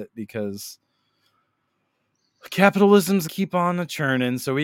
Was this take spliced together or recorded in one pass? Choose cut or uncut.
cut